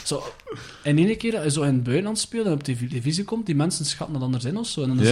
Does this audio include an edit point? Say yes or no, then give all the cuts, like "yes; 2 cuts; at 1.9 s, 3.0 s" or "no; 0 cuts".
no; 0 cuts